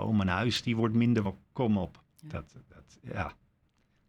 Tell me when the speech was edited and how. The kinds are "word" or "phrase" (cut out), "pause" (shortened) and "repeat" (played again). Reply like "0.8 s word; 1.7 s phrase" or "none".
1.2 s phrase; 2.1 s pause